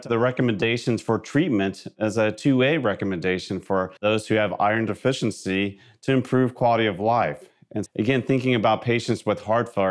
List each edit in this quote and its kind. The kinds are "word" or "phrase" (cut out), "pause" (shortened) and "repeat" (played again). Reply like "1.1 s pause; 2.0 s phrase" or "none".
4.0 s pause; 7.9 s word